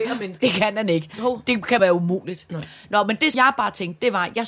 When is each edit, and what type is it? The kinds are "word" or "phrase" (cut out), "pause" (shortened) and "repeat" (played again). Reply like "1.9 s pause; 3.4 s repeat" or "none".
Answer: 1.8 s word; 3.3 s word